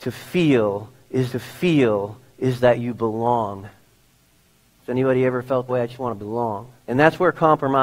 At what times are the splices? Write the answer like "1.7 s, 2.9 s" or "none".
1.3 s, 5.7 s, 6.8 s